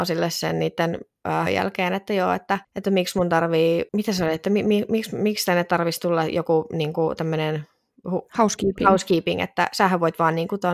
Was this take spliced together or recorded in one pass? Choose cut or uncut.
cut